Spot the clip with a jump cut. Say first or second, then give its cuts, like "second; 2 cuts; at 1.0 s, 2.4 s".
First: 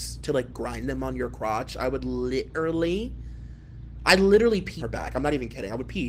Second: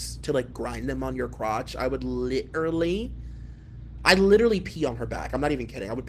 first; 1 cut; at 4.8 s